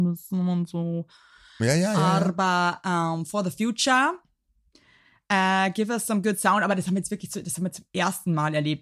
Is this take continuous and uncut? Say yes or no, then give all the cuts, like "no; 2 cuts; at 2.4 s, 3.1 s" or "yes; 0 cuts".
yes; 0 cuts